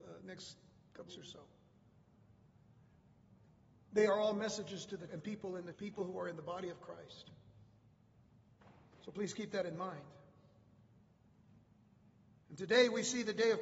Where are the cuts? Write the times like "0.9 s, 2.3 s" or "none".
1.1 s, 5.1 s, 5.7 s